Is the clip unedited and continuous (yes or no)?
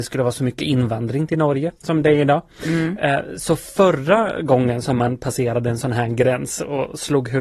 no